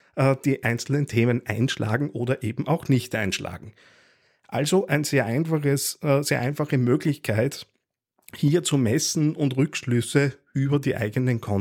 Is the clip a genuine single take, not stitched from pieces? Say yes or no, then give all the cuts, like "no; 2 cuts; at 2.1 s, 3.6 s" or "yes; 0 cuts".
yes; 0 cuts